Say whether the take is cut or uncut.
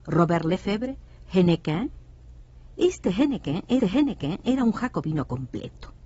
cut